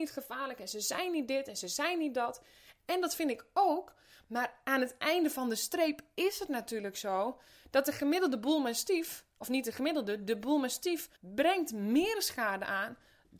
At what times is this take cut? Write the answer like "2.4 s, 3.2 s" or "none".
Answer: 11.2 s